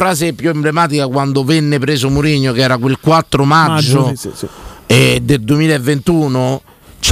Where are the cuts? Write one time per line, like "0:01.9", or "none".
none